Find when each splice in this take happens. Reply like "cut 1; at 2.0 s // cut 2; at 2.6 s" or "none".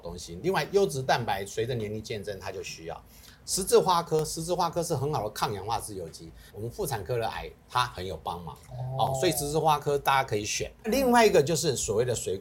cut 1; at 6.5 s // cut 2; at 7.6 s